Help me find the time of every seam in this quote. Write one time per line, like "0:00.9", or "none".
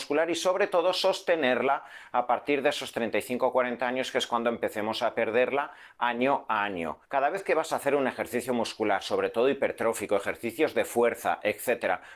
0:07.0